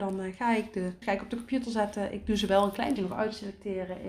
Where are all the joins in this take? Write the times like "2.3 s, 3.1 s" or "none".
1.0 s, 3.0 s